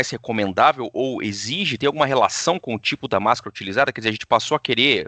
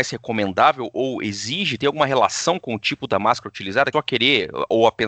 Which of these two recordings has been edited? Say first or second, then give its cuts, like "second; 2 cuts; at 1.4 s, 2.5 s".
second; 1 cut; at 3.9 s